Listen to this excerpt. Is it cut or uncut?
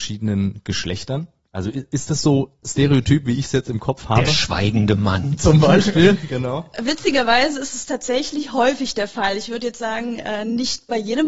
uncut